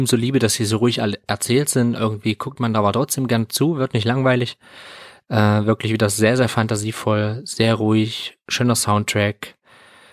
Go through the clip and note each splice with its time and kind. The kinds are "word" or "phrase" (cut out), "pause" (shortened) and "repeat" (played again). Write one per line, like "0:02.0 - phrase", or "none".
0:08.4 - pause